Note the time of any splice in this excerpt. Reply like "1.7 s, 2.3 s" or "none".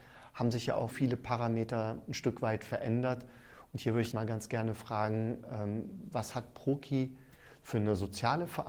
0.9 s, 2.1 s, 4.1 s